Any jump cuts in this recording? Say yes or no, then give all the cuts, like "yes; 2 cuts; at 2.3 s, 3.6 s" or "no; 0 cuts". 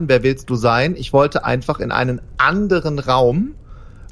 no; 0 cuts